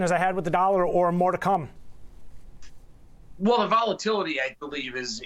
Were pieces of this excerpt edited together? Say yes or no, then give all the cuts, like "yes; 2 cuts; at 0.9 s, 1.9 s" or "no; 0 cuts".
no; 0 cuts